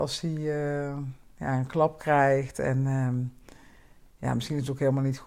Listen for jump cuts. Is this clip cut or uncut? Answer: uncut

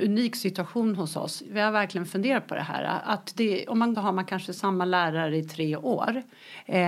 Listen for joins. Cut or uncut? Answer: cut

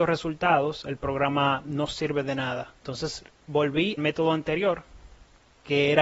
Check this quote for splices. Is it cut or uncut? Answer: cut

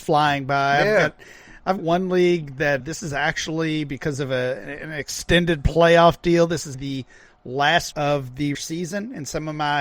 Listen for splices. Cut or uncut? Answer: cut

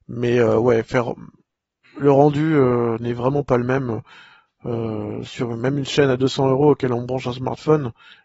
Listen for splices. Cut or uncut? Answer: uncut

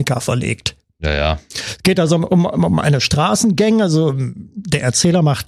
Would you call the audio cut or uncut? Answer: uncut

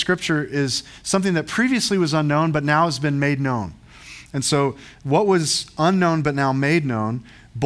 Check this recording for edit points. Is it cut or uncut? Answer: uncut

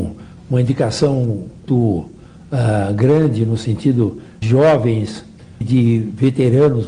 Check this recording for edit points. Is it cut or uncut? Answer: cut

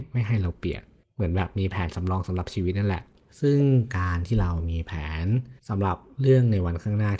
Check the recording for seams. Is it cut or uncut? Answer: cut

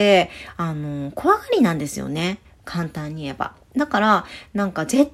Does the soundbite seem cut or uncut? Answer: uncut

